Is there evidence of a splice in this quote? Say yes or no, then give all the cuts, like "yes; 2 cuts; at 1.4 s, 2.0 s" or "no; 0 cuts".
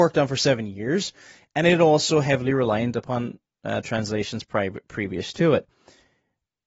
no; 0 cuts